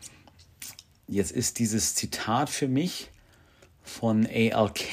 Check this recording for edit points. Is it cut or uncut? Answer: uncut